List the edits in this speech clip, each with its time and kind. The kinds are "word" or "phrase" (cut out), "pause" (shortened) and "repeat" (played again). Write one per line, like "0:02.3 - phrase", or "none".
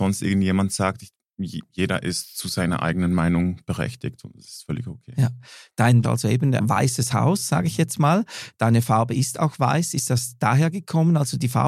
0:01.7 - pause
0:06.0 - phrase
0:06.6 - word